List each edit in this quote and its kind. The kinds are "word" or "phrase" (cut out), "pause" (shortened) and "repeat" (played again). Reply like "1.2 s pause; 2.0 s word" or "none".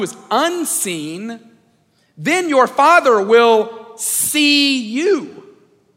none